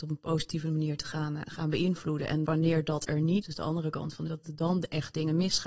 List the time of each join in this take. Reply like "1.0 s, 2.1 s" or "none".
2.5 s, 3.4 s, 4.3 s

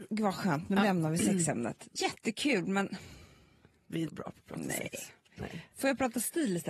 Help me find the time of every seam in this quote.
2.0 s, 4.1 s

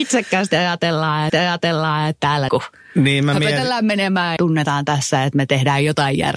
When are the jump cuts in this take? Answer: 1.3 s, 2.5 s, 4.4 s

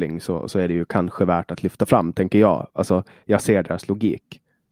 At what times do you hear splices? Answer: none

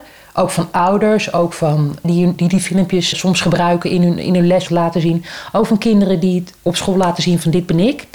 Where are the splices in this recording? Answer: 2.0 s, 3.1 s, 4.7 s, 6.6 s

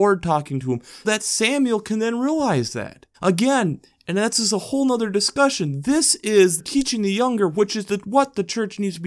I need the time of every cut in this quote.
1.0 s, 3.1 s, 6.6 s

